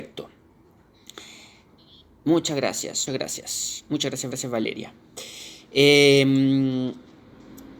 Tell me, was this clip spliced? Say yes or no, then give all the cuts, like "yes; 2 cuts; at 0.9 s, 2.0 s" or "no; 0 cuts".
yes; 3 cuts; at 1.8 s, 3.1 s, 4.3 s